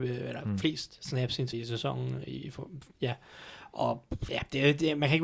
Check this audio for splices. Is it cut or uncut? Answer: cut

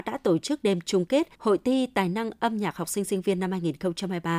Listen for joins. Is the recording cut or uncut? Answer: cut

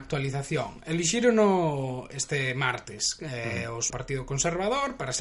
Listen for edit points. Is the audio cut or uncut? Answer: cut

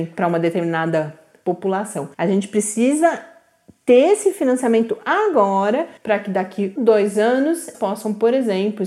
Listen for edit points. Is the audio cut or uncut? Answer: cut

